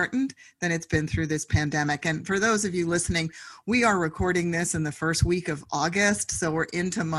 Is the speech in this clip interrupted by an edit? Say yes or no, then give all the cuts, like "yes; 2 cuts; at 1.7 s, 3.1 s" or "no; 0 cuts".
no; 0 cuts